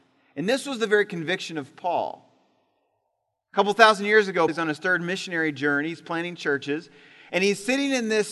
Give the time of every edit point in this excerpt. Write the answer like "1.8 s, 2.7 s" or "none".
4.5 s